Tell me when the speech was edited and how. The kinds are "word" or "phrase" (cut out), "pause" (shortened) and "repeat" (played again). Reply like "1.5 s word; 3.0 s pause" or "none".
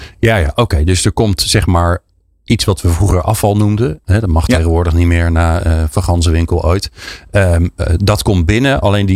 none